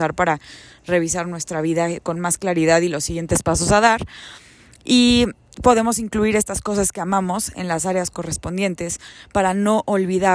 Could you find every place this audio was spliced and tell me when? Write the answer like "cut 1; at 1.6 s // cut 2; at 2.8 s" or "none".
none